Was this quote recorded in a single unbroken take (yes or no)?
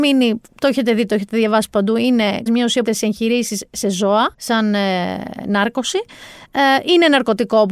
no